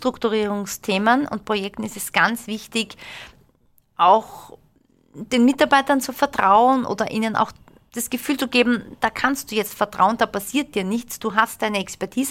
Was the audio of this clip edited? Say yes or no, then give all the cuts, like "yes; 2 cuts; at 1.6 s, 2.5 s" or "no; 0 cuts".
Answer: no; 0 cuts